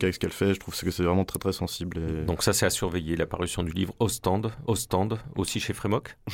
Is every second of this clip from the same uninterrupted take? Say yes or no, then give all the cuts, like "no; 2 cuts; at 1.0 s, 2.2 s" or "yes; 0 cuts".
no; 2 cuts; at 1.3 s, 4.7 s